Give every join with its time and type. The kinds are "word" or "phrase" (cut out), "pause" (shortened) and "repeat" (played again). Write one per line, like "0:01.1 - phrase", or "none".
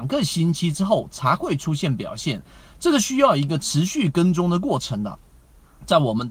none